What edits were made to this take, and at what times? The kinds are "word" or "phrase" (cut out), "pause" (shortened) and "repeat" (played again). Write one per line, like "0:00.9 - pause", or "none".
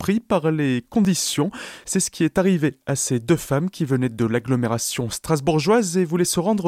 none